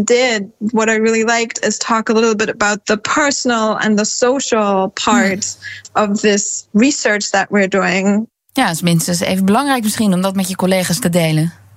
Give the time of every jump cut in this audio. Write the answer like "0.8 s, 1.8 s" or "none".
none